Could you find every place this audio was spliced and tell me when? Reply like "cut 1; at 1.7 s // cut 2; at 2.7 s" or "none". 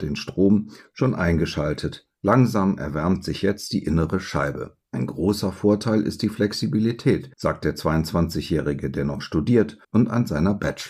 cut 1; at 4.8 s // cut 2; at 7.3 s // cut 3; at 9.8 s